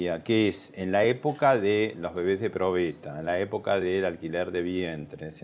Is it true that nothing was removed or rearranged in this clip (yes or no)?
yes